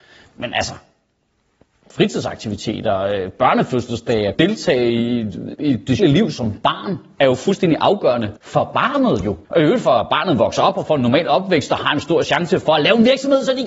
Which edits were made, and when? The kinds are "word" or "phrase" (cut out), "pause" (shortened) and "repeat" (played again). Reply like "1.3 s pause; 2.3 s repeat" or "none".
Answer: 4.3 s word; 5.6 s word; 6.0 s word; 8.4 s pause; 9.4 s pause